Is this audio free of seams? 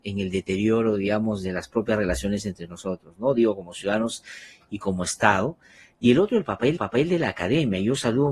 no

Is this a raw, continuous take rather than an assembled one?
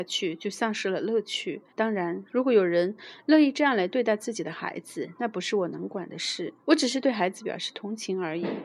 no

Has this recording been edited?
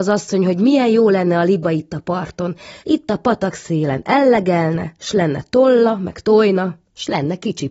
yes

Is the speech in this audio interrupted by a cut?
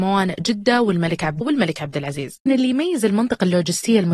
yes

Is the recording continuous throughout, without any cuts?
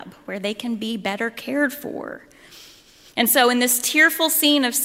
yes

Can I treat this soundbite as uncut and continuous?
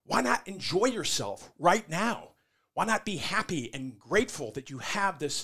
yes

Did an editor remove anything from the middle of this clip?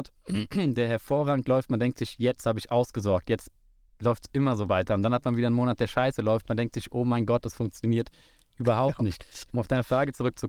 no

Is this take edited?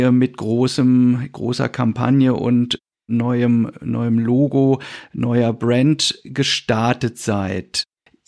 no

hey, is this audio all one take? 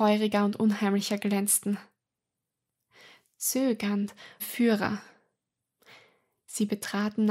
no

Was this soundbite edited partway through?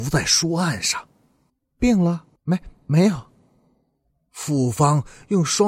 yes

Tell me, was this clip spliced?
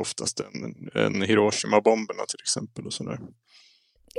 no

